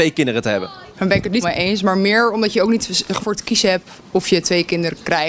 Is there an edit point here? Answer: yes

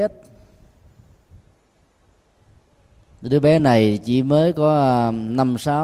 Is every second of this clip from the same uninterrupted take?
yes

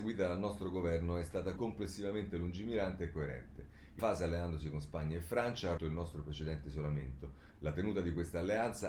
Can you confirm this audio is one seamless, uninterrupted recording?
no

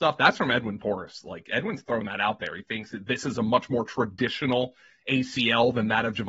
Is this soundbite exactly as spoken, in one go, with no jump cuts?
yes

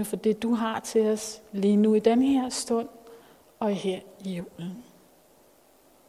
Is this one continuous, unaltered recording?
yes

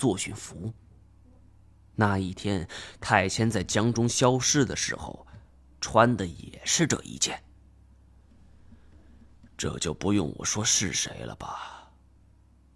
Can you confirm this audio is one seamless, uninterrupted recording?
yes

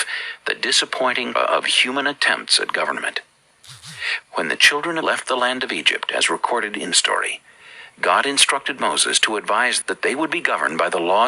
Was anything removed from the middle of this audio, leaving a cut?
yes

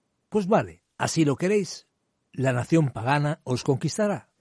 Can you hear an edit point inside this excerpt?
yes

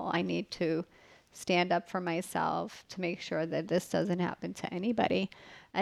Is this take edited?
no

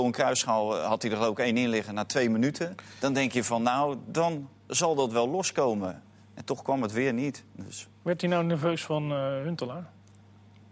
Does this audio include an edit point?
no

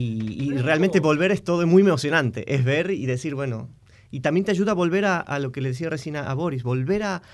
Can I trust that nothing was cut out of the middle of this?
yes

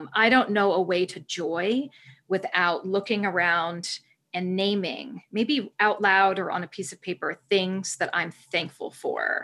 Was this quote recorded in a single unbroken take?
yes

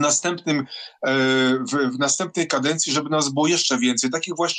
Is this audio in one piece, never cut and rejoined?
yes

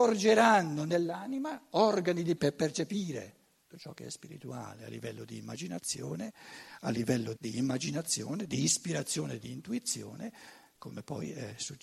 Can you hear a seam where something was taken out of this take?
yes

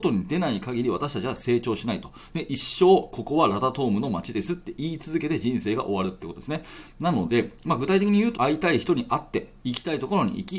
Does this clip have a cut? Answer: yes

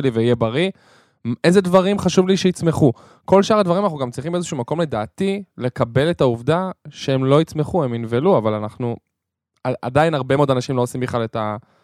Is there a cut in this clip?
no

